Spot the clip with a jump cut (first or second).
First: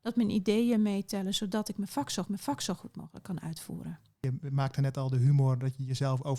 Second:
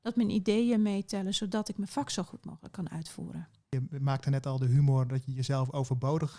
first